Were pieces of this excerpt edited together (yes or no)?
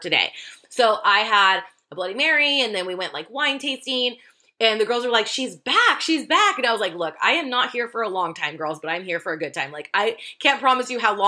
no